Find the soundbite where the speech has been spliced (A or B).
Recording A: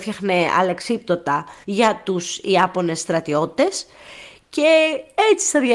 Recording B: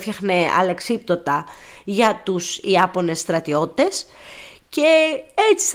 A